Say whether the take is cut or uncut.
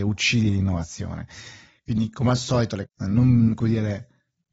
cut